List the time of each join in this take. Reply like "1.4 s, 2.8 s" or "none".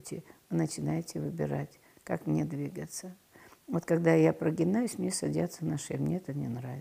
none